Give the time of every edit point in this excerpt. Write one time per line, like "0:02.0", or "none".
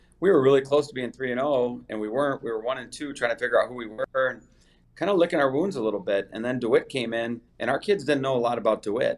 0:07.5